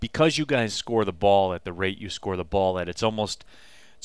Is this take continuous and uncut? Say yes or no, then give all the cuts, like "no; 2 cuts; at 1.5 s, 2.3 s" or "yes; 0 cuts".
yes; 0 cuts